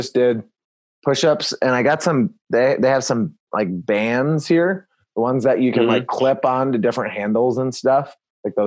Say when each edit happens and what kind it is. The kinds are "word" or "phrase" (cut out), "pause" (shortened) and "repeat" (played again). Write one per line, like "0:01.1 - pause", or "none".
none